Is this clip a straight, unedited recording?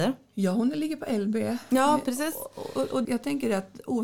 no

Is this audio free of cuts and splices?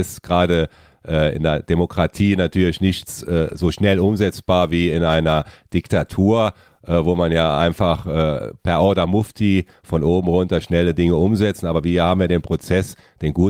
yes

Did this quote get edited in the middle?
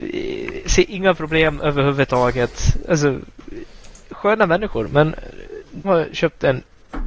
yes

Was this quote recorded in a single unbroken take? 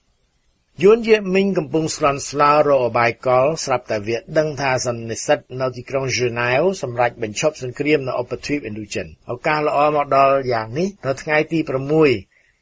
no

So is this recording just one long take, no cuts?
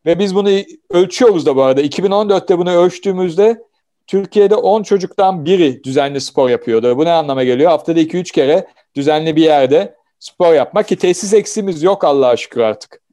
yes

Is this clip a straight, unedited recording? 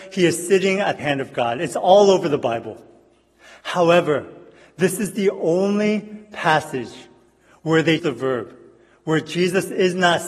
no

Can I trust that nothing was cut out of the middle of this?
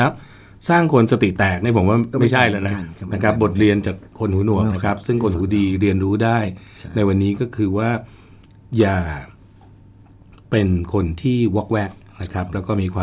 yes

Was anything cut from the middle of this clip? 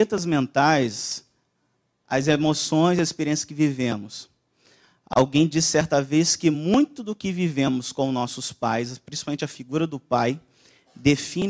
no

